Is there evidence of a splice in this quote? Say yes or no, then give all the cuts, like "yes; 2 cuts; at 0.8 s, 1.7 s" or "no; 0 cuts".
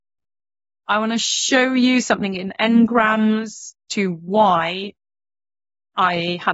yes; 1 cut; at 3.9 s